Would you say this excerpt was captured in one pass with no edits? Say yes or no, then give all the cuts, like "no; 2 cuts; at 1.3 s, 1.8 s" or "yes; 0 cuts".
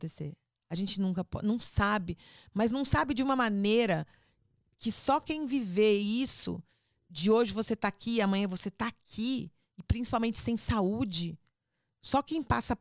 yes; 0 cuts